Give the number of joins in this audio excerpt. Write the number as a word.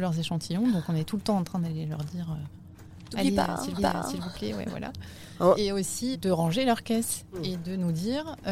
two